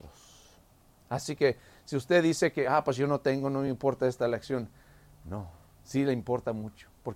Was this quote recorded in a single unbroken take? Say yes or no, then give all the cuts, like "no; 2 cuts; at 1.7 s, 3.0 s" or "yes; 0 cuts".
yes; 0 cuts